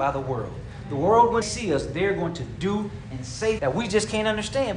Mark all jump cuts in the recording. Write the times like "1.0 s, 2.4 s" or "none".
1.4 s, 3.6 s